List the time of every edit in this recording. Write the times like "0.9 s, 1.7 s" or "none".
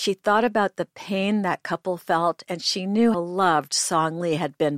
3.1 s